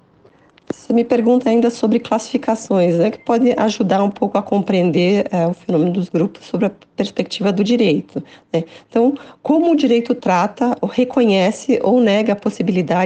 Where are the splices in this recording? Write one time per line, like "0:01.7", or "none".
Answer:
none